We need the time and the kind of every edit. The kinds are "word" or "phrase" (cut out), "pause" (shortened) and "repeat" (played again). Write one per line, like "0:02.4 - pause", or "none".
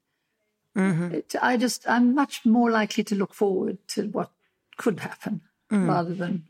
none